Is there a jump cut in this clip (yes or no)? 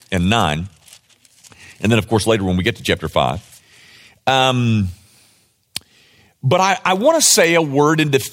no